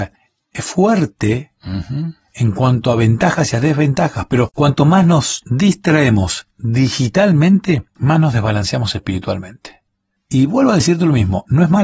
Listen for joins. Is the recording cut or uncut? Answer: cut